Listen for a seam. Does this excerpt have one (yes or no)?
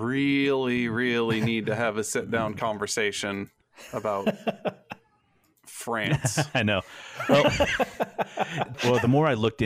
no